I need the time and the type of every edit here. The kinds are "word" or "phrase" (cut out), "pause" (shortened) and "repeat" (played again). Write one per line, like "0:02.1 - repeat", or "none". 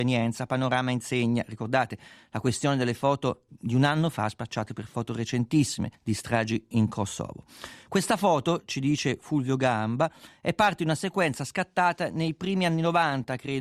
0:03.5 - word
0:05.9 - pause